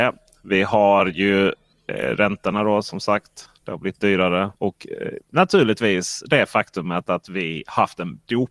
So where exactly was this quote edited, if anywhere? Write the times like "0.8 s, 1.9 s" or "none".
4.5 s